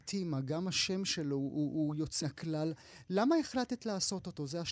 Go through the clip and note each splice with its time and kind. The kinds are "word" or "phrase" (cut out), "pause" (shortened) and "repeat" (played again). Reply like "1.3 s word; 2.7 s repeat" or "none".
2.2 s word

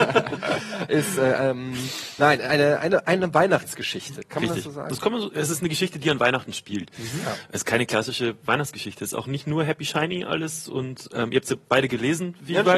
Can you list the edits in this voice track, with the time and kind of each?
none

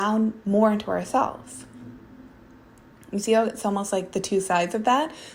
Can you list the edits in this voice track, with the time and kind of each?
none

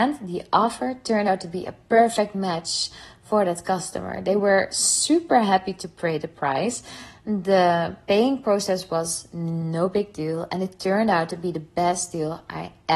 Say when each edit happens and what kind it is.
none

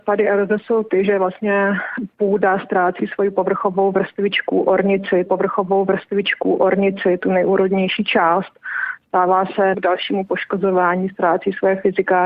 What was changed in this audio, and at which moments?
5.3 s repeat; 9.7 s word

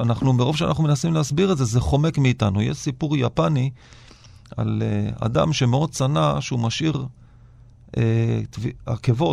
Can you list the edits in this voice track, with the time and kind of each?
none

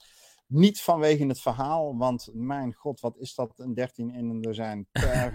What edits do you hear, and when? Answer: none

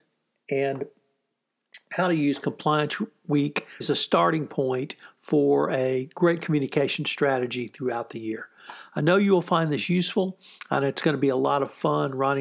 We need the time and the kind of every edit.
3.8 s word

